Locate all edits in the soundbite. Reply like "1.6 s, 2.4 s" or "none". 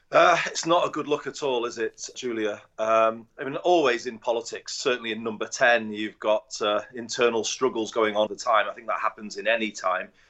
2.1 s, 3.3 s, 8.3 s